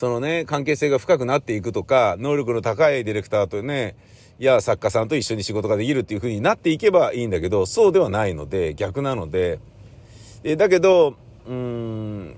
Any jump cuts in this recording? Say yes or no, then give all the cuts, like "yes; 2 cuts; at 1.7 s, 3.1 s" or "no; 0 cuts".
no; 0 cuts